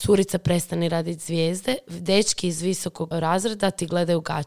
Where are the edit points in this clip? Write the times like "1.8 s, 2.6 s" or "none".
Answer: 3.1 s